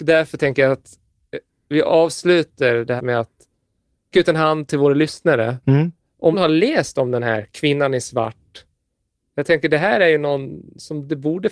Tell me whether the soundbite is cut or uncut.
cut